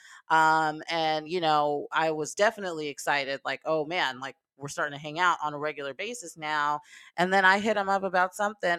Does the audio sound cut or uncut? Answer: uncut